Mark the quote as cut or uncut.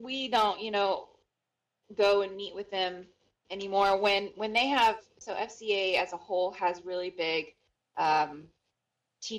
uncut